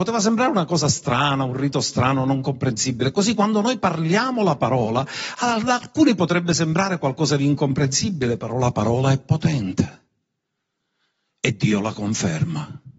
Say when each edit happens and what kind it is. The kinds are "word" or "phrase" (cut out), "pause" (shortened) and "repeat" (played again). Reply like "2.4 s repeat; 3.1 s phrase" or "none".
none